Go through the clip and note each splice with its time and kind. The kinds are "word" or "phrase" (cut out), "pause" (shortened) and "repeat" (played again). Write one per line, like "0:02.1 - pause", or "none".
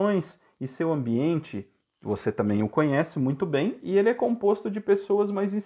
none